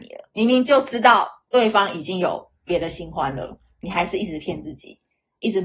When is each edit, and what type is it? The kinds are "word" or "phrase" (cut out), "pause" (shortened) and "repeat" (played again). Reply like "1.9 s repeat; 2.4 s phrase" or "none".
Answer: 1.5 s pause

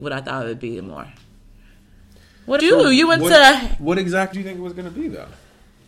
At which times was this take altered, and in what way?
2.6 s word; 4.3 s word

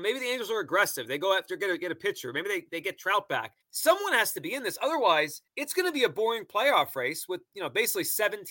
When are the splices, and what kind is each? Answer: 3.6 s pause; 5.5 s pause

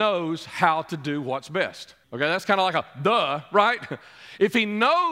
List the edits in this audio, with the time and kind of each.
2.0 s pause

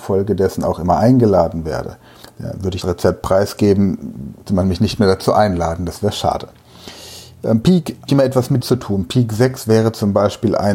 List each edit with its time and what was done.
2.2 s pause; 2.8 s word; 4.5 s word; 8.1 s phrase; 8.6 s phrase

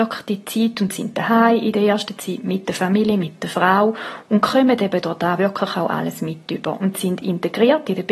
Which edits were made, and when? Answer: none

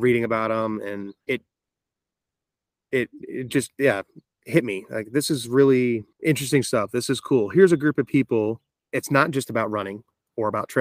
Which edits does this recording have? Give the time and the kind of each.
1.2 s pause; 6.1 s pause

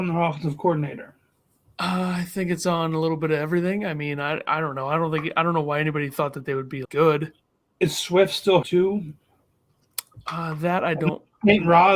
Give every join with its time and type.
6.8 s word; 8.6 s word

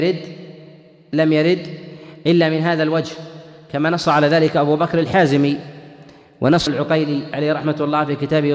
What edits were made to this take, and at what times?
6.7 s word

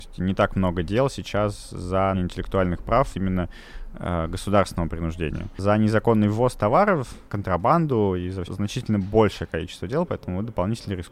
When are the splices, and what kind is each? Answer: 2.1 s word; 3.1 s word; 7.3 s pause; 8.4 s phrase

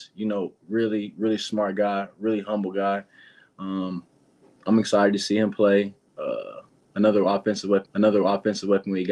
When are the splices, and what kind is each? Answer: 7.9 s repeat

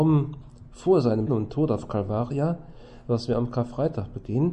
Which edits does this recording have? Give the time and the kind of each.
1.3 s word

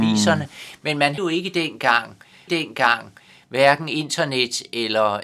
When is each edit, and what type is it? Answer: 1.2 s word; 2.5 s repeat

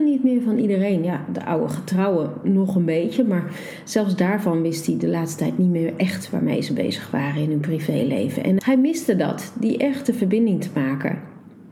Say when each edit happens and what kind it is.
8.6 s word

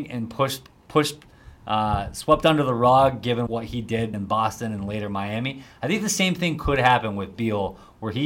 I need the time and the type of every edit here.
3.5 s word; 4.1 s word

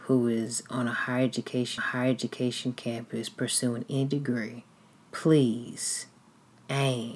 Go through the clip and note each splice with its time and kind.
1.8 s repeat; 4.9 s pause

